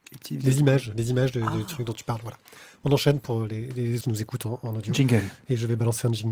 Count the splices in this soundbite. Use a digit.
1